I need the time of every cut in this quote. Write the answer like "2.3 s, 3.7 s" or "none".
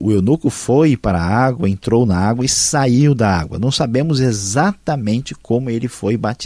none